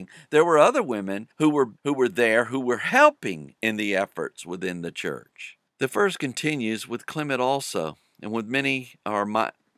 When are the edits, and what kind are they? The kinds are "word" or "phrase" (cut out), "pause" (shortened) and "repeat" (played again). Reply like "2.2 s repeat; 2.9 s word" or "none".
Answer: 1.3 s pause; 1.8 s pause; 5.7 s pause